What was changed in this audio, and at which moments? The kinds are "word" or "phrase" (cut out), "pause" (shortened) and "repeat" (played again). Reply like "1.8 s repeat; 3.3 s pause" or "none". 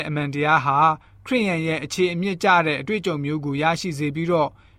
none